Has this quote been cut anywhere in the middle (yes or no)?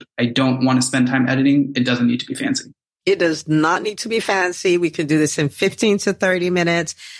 no